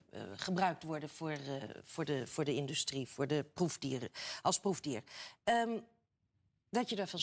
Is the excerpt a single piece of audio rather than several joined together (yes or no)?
yes